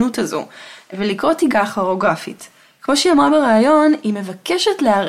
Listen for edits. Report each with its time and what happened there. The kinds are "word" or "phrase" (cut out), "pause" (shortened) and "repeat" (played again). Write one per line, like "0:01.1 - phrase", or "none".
0:01.5 - phrase

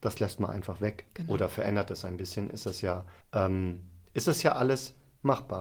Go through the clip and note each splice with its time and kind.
0:03.2 - pause

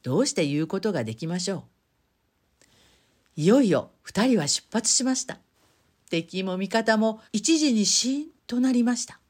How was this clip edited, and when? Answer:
0:05.5 - pause
0:07.2 - pause
0:08.4 - pause

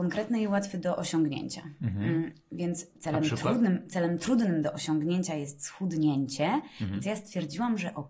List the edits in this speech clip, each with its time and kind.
none

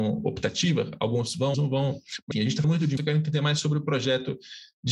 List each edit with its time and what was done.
0:01.5 - word
0:02.3 - word
0:02.6 - word
0:03.0 - word

